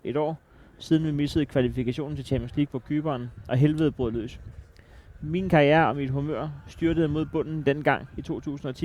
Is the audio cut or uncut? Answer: uncut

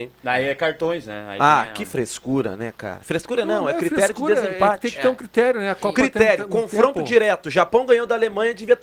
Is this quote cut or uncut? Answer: uncut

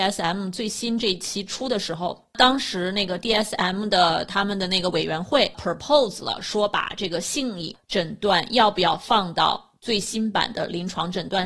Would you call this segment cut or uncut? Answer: uncut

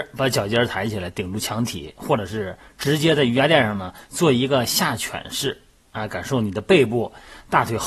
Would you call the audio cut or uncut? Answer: cut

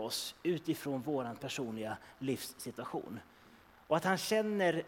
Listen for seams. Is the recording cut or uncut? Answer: uncut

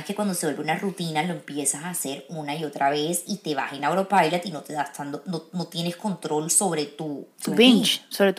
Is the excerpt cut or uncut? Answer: cut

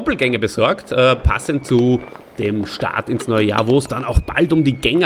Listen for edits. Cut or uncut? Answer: uncut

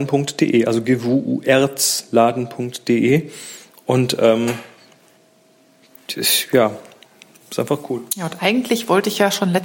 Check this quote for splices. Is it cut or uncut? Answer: uncut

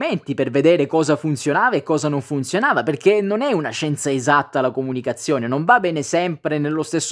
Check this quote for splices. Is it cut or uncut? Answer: uncut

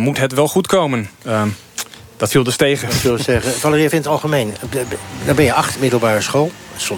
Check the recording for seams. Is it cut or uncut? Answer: cut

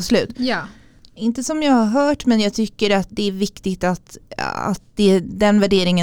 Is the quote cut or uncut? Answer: cut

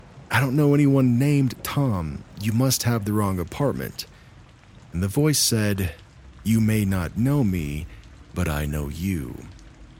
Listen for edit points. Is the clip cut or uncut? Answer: uncut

